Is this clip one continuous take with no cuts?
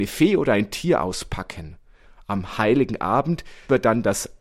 yes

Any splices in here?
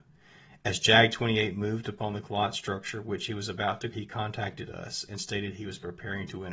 yes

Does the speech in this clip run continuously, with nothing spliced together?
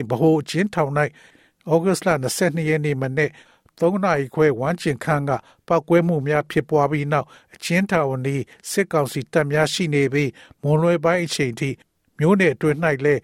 yes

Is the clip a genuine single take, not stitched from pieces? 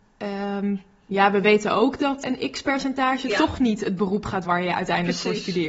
no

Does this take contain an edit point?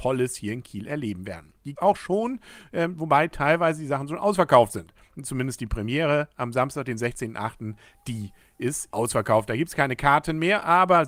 yes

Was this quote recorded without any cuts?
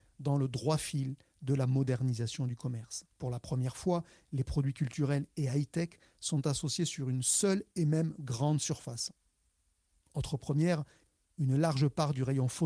no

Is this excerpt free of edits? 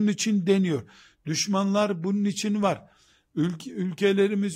yes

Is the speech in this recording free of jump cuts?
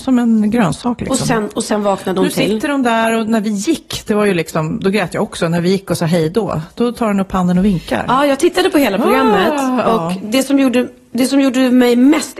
yes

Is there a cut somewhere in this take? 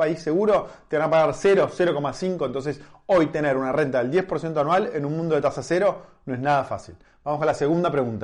no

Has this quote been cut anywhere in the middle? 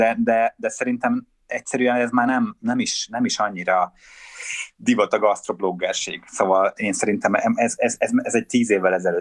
yes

